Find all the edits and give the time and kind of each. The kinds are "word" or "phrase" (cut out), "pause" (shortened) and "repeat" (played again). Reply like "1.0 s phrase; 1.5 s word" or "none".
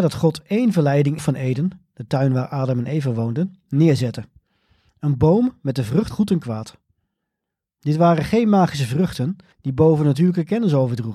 1.2 s phrase; 6.1 s word; 9.5 s pause